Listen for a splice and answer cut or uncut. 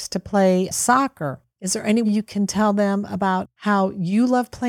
cut